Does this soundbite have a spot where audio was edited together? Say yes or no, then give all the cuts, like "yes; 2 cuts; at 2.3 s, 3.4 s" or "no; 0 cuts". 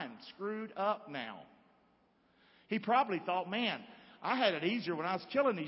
no; 0 cuts